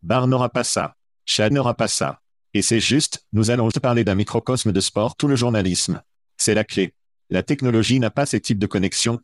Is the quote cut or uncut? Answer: cut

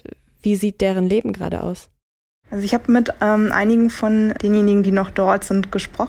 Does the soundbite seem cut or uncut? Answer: uncut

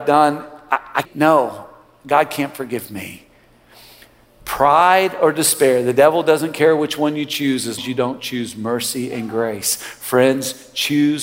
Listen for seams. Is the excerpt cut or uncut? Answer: cut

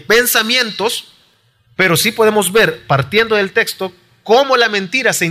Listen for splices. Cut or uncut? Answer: uncut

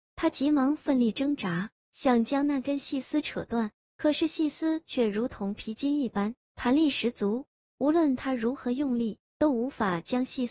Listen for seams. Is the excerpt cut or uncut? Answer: uncut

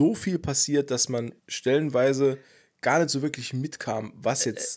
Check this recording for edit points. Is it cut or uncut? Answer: cut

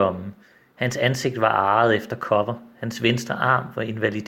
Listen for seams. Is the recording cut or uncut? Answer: uncut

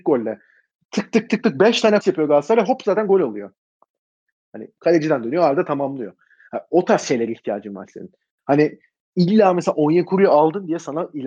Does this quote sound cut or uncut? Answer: cut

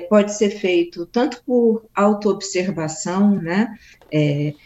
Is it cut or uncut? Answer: uncut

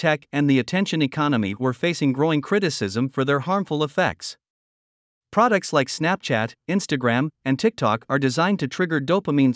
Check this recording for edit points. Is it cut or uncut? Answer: uncut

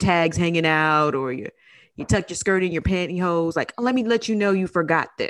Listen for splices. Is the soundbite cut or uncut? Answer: uncut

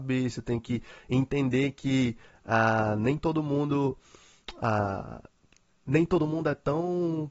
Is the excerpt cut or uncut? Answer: uncut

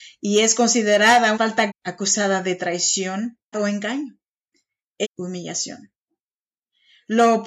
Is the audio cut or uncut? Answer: cut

